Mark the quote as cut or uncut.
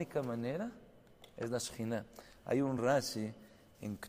uncut